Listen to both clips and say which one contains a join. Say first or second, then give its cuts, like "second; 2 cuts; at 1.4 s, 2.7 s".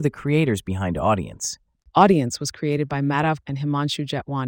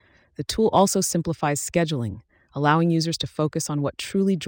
first; 1 cut; at 3.4 s